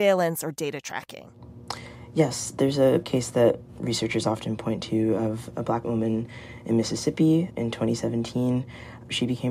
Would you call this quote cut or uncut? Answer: cut